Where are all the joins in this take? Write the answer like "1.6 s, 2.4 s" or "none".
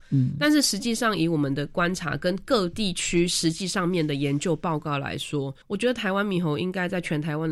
5.6 s